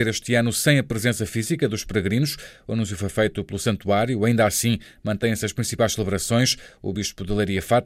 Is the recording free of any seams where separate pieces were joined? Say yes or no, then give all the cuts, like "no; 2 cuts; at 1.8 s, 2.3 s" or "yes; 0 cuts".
yes; 0 cuts